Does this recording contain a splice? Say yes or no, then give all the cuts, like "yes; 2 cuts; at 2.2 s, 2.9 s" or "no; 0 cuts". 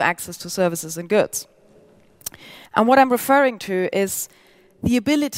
yes; 1 cut; at 2.7 s